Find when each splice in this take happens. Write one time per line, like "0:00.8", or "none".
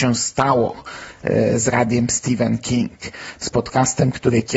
none

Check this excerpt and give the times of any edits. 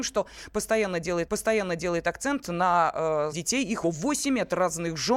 0:01.3
0:03.3
0:03.8

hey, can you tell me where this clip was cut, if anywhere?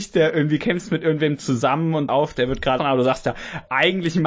0:02.1
0:02.8

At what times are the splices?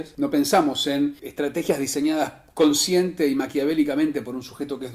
none

